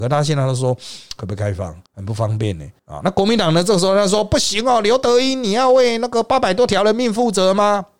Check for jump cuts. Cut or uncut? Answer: cut